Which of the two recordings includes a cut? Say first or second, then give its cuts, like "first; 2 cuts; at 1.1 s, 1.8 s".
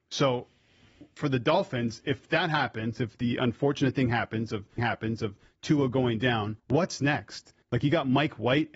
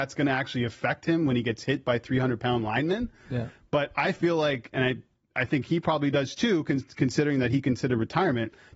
first; 3 cuts; at 4.8 s, 6.6 s, 7.6 s